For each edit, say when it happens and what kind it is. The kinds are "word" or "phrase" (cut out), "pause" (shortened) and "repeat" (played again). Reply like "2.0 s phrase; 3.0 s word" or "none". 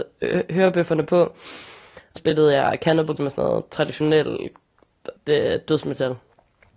2.2 s word; 3.2 s word; 5.2 s word